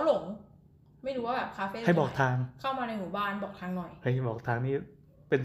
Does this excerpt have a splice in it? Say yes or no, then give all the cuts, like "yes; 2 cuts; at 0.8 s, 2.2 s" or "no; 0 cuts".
no; 0 cuts